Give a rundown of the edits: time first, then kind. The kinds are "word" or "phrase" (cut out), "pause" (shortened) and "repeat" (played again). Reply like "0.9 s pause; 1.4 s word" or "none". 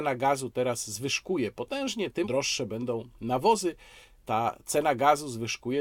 2.2 s word